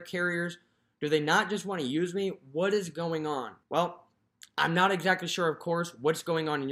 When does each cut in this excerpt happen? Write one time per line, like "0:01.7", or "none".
0:03.6